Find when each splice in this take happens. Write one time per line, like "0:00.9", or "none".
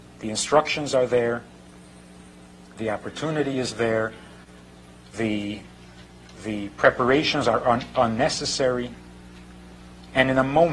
none